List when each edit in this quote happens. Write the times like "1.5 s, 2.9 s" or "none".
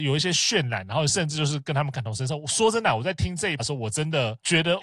3.6 s